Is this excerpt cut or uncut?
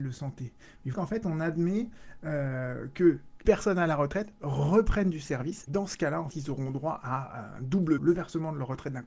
cut